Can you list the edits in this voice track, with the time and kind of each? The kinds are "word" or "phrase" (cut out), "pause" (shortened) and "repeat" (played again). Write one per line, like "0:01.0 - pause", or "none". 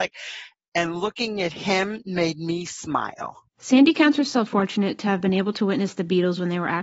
0:03.5 - pause
0:04.5 - word